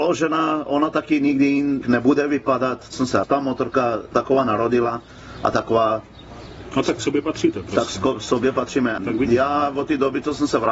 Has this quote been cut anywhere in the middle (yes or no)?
yes